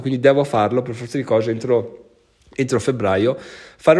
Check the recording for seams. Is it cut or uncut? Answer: uncut